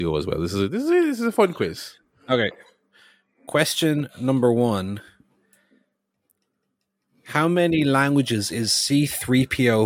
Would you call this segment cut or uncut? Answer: uncut